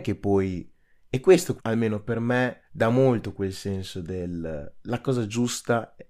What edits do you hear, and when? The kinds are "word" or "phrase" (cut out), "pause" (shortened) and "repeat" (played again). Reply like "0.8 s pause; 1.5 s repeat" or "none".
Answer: 1.6 s word; 2.7 s pause